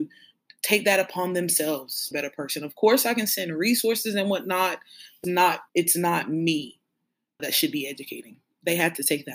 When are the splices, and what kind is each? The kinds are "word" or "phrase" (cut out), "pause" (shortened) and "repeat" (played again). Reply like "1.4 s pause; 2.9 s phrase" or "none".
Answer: 2.1 s phrase; 5.2 s word; 5.7 s pause; 7.4 s word